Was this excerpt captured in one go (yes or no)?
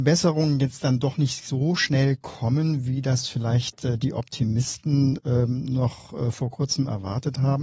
yes